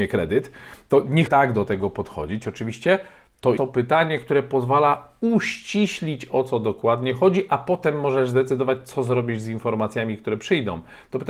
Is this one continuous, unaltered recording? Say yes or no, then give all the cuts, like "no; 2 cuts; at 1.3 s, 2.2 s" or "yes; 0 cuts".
no; 2 cuts; at 1.3 s, 3.6 s